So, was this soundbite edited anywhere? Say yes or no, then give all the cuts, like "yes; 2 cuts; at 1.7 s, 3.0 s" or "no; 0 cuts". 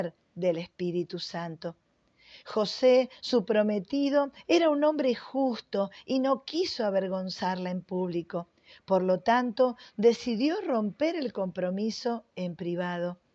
no; 0 cuts